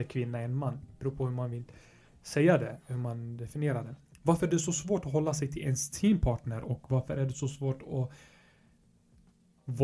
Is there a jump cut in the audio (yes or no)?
no